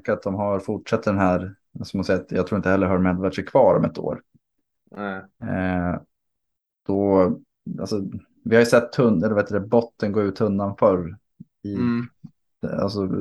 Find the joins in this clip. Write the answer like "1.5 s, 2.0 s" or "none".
none

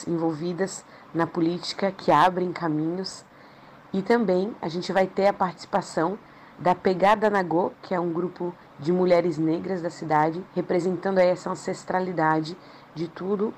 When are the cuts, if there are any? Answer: 10.5 s

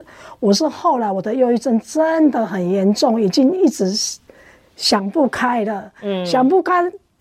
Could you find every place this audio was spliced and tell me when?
none

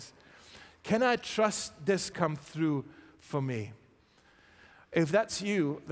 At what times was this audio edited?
2.1 s

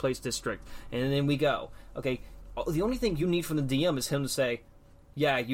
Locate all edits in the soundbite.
none

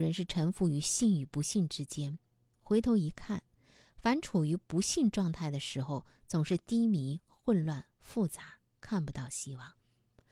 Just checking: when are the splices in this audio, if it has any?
none

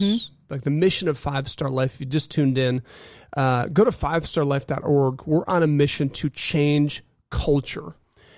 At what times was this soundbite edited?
none

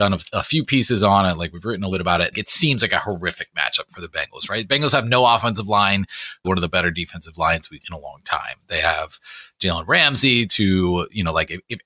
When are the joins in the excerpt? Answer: 1.9 s, 2.3 s, 6.4 s, 7.8 s

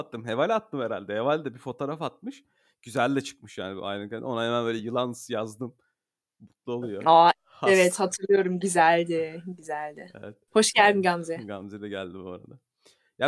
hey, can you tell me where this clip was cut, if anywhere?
none

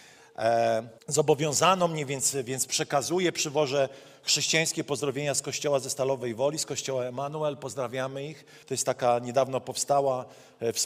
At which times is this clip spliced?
1.0 s, 8.6 s

